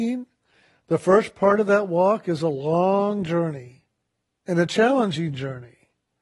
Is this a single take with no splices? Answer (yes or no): no